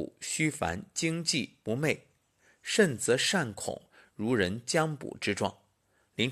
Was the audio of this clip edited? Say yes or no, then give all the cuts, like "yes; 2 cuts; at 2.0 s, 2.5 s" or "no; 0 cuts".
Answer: no; 0 cuts